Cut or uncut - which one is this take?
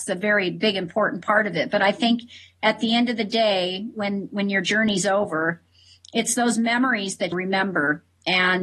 cut